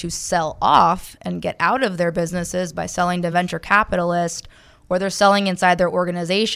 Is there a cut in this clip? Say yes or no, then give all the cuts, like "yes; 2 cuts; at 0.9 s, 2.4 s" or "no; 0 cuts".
no; 0 cuts